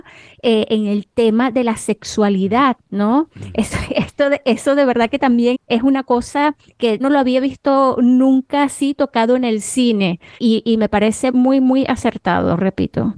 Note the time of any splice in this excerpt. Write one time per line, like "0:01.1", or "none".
0:05.5
0:07.0
0:10.4
0:11.3